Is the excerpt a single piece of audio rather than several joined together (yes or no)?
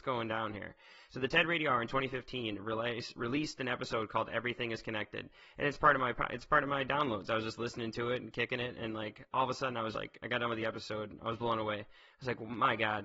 no